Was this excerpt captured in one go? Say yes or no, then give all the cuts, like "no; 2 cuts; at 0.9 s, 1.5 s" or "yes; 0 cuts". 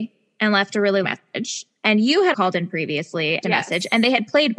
no; 3 cuts; at 1.0 s, 2.3 s, 3.4 s